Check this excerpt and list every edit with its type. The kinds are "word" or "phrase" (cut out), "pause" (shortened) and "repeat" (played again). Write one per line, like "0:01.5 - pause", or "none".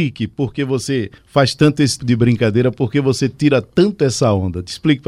0:02.0 - word

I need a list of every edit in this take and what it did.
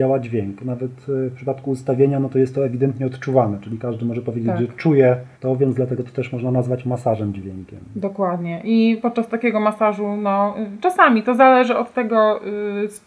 0:05.3 - pause

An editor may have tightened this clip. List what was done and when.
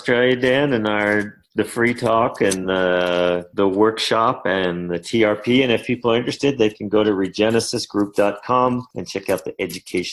none

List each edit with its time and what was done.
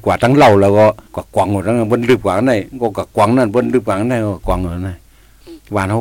0:01.1 - pause

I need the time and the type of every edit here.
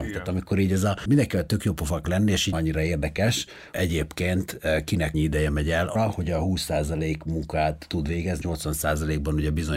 0:02.0 - word
0:02.5 - word
0:03.7 - word
0:05.1 - word
0:05.9 - word
0:08.4 - word

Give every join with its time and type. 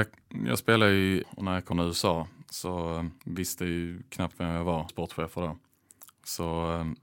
0:01.2 - phrase
0:01.7 - phrase
0:03.2 - pause
0:04.3 - word
0:04.9 - word

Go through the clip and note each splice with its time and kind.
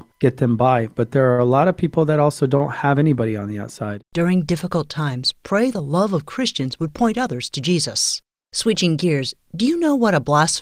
none

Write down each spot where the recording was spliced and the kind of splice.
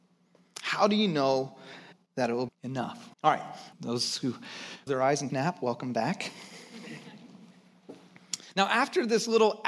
0:01.9 - pause
0:02.5 - word
0:03.1 - pause
0:03.7 - word
0:04.9 - word
0:05.3 - phrase

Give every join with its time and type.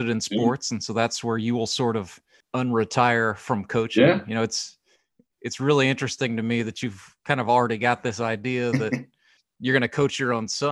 none

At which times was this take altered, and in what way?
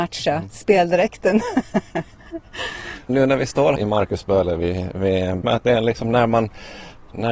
0:03.1 - word
0:03.8 - phrase
0:05.4 - phrase

